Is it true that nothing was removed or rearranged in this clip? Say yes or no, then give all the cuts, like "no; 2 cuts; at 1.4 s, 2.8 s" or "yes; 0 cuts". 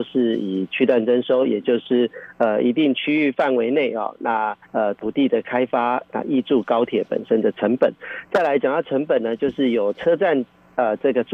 no; 1 cut; at 4.6 s